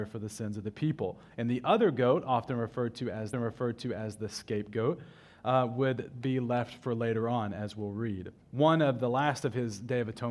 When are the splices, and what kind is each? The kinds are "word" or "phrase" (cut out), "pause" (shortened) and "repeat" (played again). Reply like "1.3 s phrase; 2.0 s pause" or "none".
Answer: 3.3 s repeat; 8.4 s pause